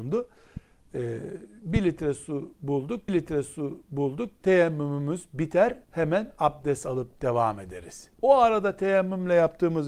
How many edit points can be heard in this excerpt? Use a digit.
3